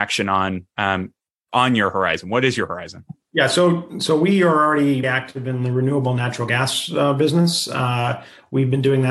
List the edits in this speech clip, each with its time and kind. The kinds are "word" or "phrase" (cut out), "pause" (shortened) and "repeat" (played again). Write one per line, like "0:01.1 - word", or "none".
0:05.0 - word